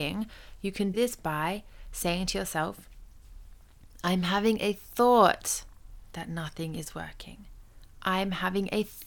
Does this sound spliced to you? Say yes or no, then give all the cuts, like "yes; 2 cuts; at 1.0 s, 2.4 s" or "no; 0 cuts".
yes; 1 cut; at 0.9 s